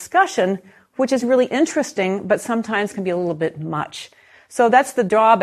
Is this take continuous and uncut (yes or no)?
yes